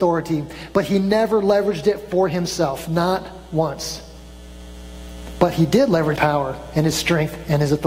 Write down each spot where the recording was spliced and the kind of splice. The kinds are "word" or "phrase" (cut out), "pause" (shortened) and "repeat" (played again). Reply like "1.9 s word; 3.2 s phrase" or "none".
6.1 s word